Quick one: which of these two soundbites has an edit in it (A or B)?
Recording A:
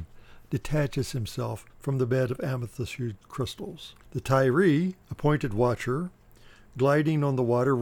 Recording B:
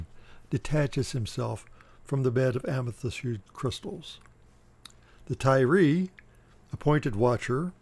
A